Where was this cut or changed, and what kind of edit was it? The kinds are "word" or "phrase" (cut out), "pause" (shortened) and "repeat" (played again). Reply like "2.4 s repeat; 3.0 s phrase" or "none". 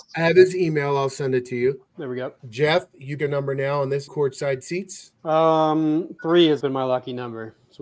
1.9 s pause; 2.4 s pause; 3.2 s word; 4.1 s phrase; 5.2 s pause; 6.6 s word